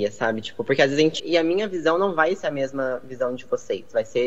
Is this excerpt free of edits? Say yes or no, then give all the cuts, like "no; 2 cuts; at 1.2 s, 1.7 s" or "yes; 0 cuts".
no; 1 cut; at 1.2 s